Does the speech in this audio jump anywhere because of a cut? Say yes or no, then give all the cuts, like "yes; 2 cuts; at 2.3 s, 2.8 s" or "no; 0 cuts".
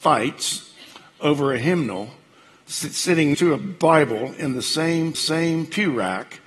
yes; 2 cuts; at 3.3 s, 5.1 s